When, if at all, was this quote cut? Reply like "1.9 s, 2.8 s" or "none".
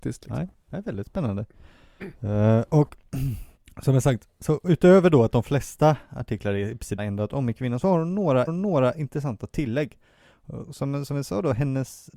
3.6 s, 7.0 s, 8.5 s